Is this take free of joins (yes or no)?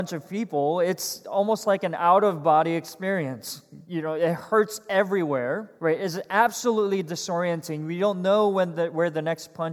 no